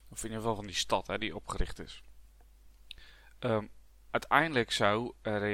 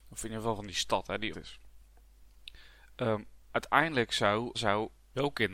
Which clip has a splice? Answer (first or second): second